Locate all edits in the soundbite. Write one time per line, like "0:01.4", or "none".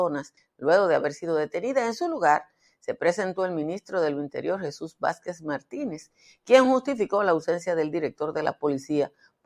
none